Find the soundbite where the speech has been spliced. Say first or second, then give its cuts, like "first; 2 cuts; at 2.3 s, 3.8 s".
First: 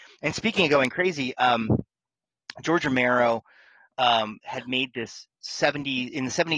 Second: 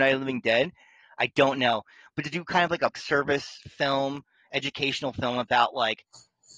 second; 1 cut; at 2.9 s